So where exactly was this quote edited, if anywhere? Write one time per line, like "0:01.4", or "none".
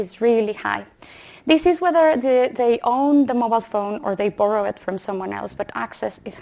none